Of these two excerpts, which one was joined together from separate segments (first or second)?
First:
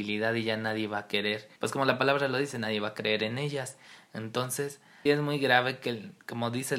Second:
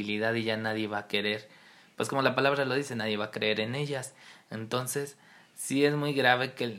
first